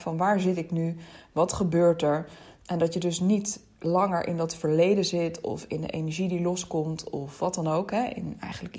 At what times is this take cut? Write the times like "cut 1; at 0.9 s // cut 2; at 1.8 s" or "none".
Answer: none